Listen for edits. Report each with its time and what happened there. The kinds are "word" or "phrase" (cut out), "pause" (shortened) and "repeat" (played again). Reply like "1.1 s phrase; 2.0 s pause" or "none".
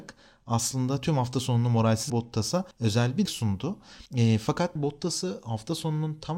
2.1 s phrase; 2.7 s pause; 3.3 s word; 4.1 s pause; 4.8 s word